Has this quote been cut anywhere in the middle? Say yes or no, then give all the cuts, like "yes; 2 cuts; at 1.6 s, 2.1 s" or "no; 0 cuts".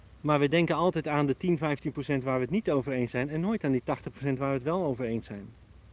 no; 0 cuts